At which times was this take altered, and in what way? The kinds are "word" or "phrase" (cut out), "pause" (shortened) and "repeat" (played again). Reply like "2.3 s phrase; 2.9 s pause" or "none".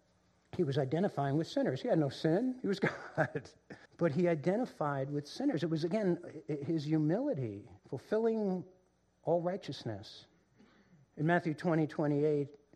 3.9 s pause; 7.8 s pause